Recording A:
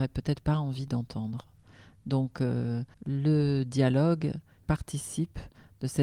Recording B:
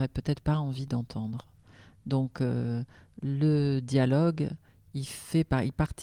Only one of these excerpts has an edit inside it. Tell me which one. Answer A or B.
A